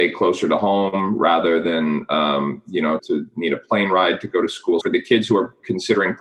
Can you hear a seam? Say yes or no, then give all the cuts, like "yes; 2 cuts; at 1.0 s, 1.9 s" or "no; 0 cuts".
yes; 2 cuts; at 3.0 s, 4.8 s